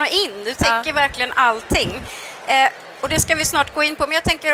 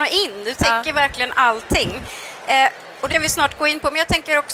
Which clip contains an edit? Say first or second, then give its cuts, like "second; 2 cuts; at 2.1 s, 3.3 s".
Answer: second; 1 cut; at 3.1 s